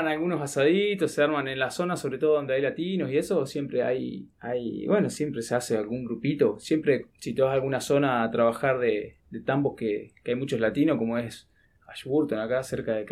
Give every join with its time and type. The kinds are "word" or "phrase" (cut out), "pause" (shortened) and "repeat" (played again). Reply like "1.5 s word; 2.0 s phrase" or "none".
4.3 s pause; 7.1 s pause; 9.2 s pause; 11.6 s pause